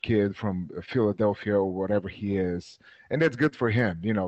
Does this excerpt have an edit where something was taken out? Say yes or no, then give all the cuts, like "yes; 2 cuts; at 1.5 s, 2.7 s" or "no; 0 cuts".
no; 0 cuts